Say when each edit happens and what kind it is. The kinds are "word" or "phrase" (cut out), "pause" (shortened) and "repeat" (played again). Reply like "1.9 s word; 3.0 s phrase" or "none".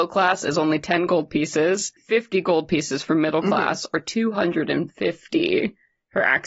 2.0 s pause